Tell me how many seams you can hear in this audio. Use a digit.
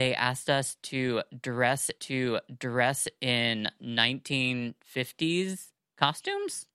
2